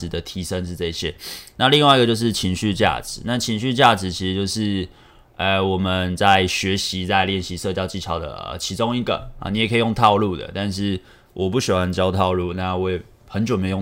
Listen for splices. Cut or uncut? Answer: uncut